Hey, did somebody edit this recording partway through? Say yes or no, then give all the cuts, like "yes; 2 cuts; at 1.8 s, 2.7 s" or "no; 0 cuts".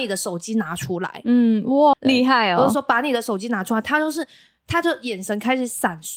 yes; 1 cut; at 1.9 s